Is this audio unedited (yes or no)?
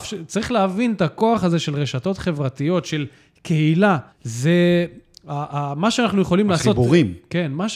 no